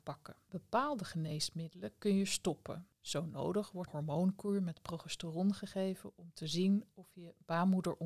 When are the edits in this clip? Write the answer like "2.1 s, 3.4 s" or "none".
3.9 s